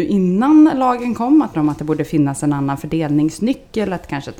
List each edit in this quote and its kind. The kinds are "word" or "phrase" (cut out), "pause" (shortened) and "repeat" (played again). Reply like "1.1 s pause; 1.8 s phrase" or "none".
1.5 s phrase